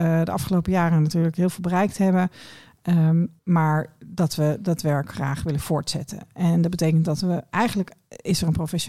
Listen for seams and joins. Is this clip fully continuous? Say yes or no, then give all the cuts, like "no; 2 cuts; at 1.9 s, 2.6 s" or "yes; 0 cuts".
no; 1 cut; at 3.4 s